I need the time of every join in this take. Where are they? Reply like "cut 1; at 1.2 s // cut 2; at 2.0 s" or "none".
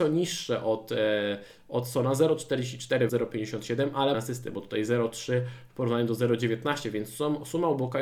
cut 1; at 3.1 s // cut 2; at 4.1 s